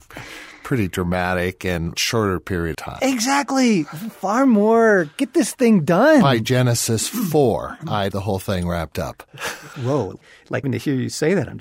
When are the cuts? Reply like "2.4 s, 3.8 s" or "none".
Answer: 1.9 s, 2.7 s, 8.1 s, 10.6 s